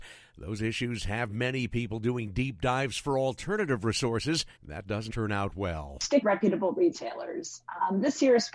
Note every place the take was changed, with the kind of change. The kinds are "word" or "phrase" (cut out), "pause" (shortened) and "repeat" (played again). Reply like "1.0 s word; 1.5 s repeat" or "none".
4.6 s pause; 5.1 s word; 6.2 s word